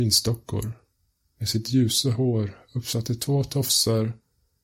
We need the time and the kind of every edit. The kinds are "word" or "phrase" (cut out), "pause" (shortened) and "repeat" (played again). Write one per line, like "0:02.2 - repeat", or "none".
none